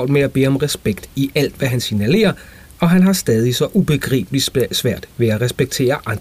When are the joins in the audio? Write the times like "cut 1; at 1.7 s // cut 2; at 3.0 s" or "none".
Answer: none